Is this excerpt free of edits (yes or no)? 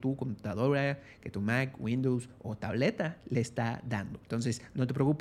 no